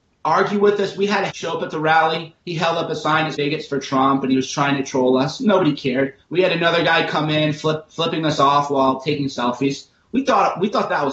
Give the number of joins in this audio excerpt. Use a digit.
4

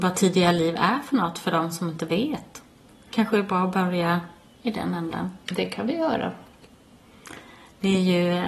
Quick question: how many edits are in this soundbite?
0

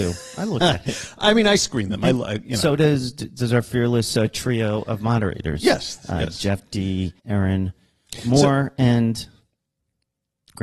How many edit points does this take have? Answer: 1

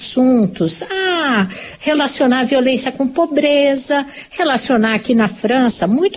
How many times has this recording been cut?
0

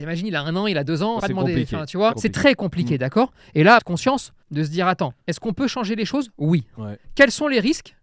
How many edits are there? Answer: 6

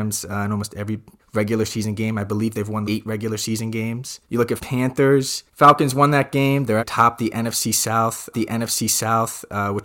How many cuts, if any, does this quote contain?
7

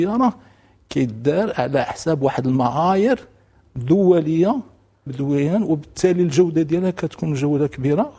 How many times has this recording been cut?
1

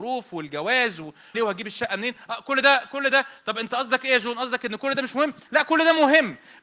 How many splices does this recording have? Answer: 1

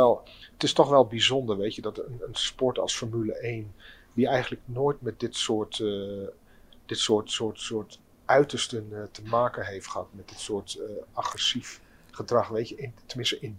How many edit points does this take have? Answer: 0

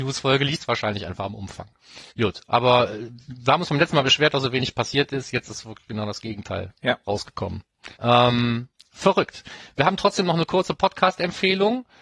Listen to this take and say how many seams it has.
2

